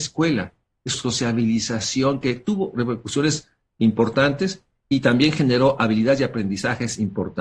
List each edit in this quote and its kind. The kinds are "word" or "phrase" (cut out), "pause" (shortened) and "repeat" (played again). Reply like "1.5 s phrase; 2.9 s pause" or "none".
0.9 s phrase